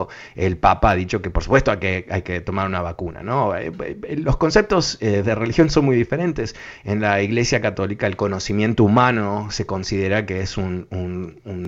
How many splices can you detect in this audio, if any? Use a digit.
0